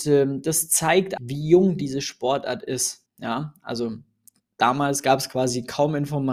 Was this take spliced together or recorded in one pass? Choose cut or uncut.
cut